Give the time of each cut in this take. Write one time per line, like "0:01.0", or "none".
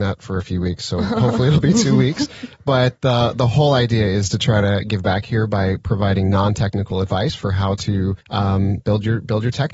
0:08.2